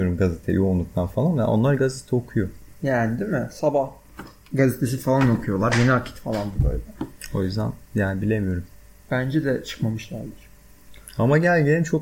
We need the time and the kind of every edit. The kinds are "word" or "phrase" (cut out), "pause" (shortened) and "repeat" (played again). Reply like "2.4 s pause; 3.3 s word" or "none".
7.8 s pause